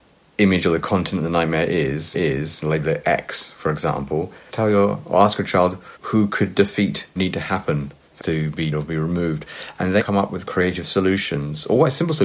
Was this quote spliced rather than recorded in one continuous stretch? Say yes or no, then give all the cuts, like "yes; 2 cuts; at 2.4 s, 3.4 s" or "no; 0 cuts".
yes; 8 cuts; at 2.1 s, 4.5 s, 6.0 s, 7.2 s, 8.2 s, 8.7 s, 10.0 s, 10.5 s